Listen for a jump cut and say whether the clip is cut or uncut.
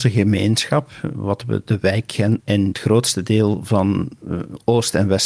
cut